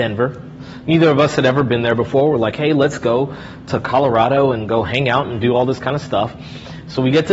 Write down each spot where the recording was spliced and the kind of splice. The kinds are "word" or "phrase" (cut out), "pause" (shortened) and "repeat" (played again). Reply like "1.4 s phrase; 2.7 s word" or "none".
none

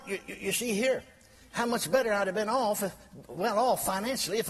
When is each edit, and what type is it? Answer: none

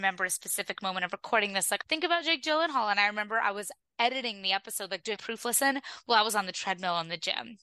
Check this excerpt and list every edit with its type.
1.8 s word; 5.2 s word

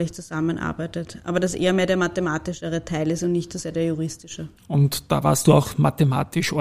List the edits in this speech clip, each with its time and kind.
4.6 s pause

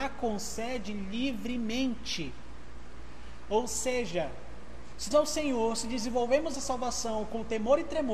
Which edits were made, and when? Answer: 5.1 s word; 6.5 s word

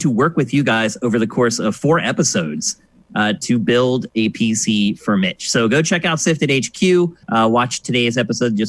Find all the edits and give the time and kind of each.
7.2 s pause

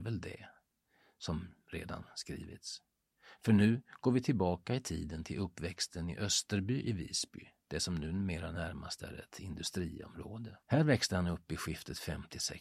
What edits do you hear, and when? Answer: 10.6 s pause

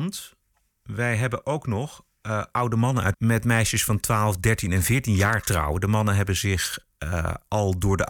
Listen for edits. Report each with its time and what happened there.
3.1 s phrase

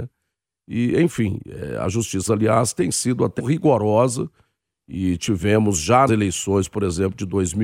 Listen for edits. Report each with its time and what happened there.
2.3 s phrase; 3.4 s word; 6.1 s word

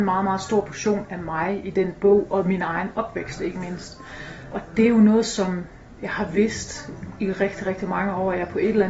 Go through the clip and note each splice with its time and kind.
none

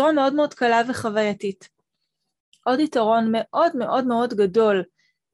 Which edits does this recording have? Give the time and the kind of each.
none

